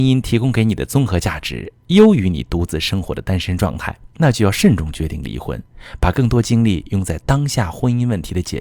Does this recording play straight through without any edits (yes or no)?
no